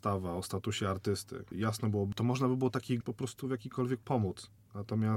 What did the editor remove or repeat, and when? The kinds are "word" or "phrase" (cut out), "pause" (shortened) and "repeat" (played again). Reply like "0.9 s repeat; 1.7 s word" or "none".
1.5 s word; 2.1 s word; 3.0 s word; 4.0 s word